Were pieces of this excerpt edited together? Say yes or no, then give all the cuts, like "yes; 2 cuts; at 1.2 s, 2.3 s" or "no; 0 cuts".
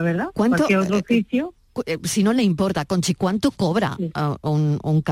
no; 0 cuts